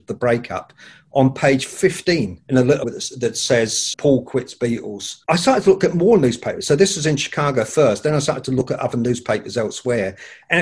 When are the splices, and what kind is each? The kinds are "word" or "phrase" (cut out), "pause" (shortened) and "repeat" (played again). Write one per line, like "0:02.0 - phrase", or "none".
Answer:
0:02.4 - pause
0:02.8 - word
0:03.9 - word
0:05.2 - pause